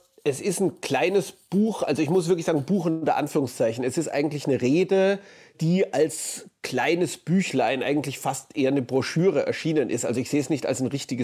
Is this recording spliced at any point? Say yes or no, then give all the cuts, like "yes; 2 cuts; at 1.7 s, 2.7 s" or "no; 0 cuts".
no; 0 cuts